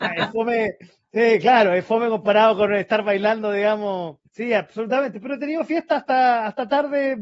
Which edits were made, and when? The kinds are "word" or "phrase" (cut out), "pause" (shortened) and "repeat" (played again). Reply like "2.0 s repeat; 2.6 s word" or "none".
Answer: 4.3 s pause